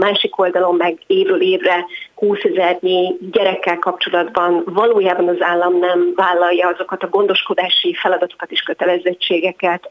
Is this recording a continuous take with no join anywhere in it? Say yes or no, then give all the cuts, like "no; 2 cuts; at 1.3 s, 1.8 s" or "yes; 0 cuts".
yes; 0 cuts